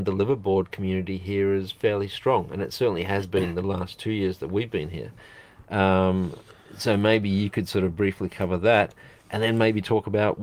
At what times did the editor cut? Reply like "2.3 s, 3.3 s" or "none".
none

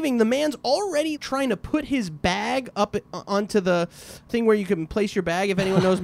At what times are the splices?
1.2 s, 4.3 s

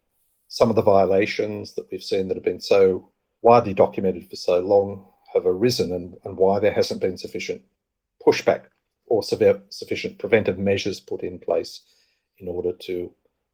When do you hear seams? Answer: none

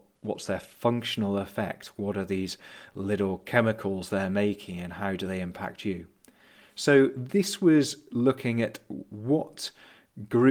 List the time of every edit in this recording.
none

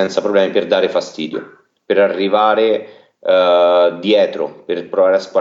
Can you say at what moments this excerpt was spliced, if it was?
none

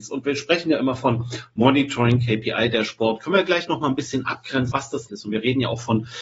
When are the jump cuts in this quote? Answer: 4.7 s, 5.1 s

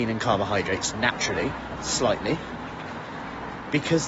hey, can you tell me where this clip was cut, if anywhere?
none

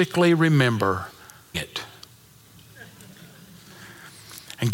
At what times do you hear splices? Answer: 1.5 s

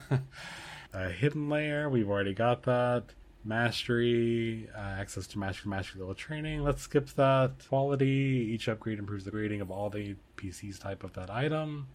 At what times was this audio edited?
5.6 s, 9.3 s

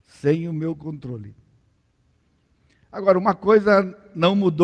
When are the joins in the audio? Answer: none

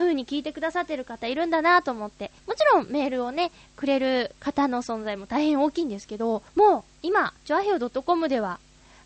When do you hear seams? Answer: 2.4 s, 6.5 s, 7.4 s

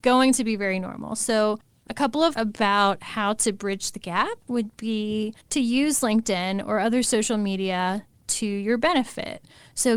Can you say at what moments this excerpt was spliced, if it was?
2.3 s, 5.4 s

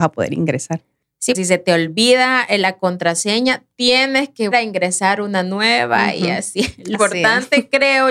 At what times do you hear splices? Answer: 1.3 s, 4.5 s, 6.9 s

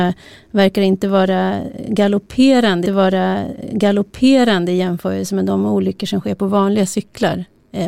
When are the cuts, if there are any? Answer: 2.9 s

